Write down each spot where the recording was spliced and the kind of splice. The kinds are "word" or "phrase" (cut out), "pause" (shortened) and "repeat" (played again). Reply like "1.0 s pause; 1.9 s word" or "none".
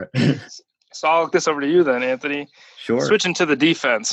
1.3 s word